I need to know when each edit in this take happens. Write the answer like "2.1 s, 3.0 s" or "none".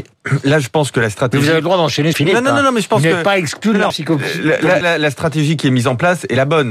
2.1 s, 3.9 s, 4.8 s